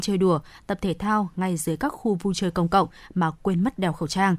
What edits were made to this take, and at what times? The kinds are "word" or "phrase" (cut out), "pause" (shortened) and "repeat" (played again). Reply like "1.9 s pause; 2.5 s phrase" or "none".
none